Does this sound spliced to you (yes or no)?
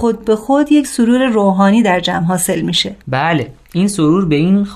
yes